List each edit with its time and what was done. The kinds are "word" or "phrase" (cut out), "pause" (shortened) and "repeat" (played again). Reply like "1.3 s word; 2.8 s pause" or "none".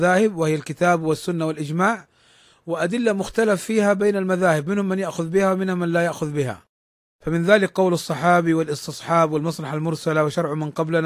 none